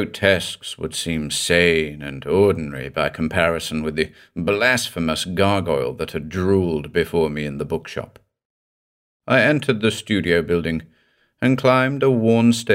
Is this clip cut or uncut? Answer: uncut